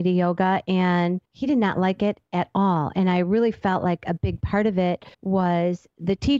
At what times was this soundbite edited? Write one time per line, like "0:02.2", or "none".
0:01.2
0:05.1